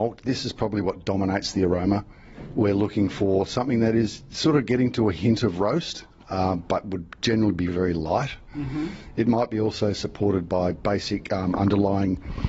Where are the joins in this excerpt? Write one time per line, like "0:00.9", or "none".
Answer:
0:07.7